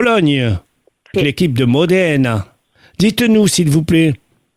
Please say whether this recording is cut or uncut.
cut